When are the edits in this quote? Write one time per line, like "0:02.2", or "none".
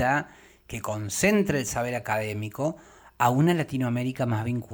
none